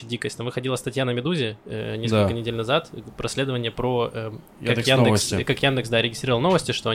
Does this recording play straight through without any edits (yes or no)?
yes